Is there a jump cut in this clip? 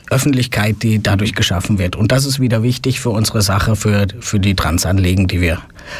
no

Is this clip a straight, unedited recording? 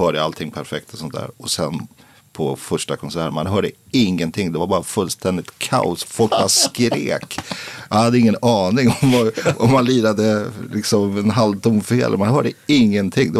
yes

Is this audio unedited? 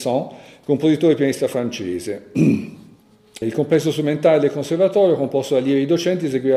no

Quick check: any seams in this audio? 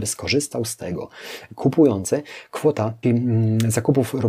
yes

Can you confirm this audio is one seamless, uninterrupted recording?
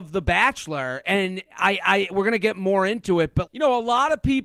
no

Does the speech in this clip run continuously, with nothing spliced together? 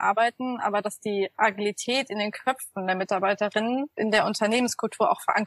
yes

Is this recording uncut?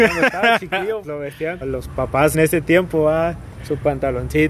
no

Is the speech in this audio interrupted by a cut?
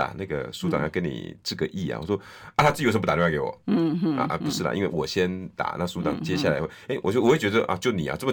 no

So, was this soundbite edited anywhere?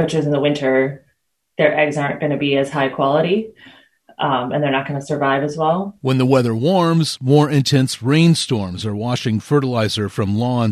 no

